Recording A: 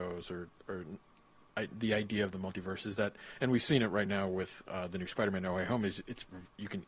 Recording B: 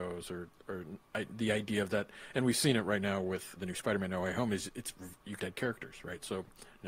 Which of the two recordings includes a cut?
B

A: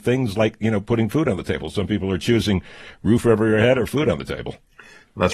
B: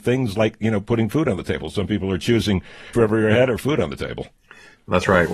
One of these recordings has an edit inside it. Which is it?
B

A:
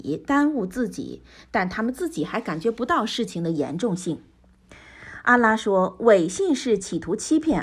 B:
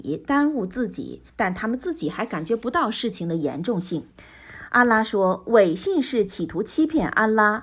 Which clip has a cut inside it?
B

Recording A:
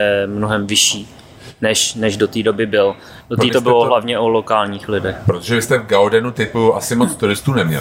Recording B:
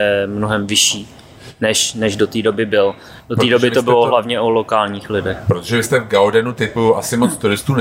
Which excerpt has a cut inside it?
A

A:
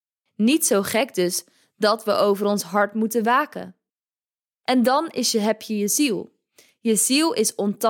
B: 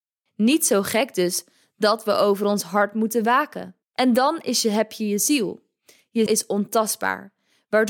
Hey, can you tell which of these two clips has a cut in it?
B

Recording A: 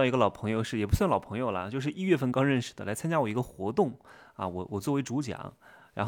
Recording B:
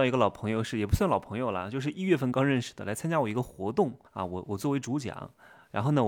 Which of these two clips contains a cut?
B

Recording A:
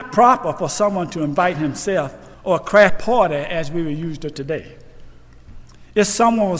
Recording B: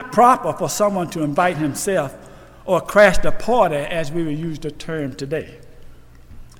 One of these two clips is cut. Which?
A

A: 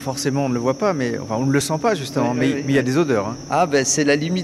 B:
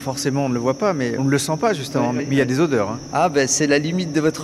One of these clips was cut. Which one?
B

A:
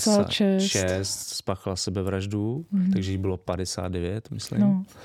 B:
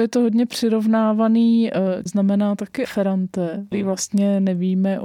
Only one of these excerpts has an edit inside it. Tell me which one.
B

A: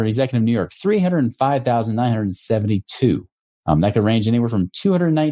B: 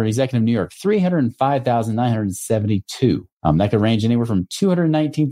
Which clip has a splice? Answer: B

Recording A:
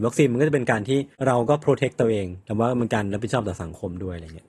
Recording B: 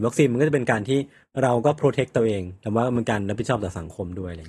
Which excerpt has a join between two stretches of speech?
A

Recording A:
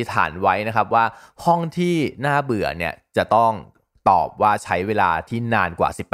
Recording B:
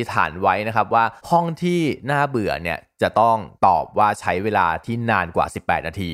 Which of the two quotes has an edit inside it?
B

